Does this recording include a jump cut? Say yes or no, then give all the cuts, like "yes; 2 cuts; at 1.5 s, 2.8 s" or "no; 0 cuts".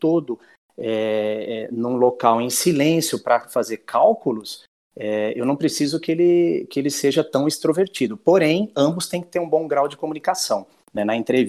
no; 0 cuts